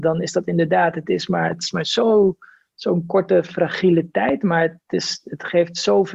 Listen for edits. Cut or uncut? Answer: uncut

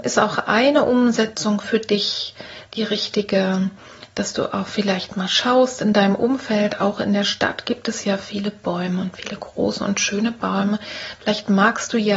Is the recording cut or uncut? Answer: uncut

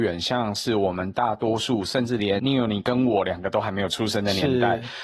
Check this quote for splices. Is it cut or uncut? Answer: cut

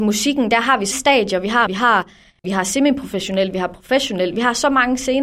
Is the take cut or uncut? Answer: cut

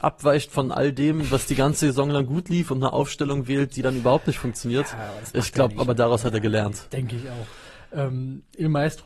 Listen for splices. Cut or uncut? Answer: uncut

